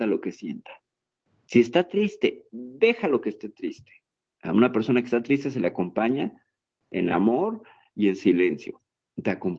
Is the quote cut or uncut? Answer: uncut